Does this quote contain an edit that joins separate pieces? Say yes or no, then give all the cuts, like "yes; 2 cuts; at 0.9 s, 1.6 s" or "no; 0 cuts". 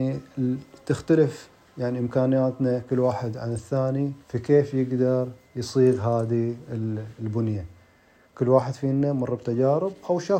yes; 1 cut; at 4.2 s